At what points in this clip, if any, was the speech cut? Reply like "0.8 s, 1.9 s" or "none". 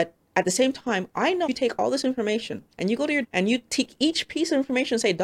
1.5 s, 2.7 s, 3.2 s